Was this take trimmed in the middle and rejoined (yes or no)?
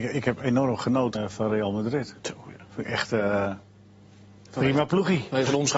yes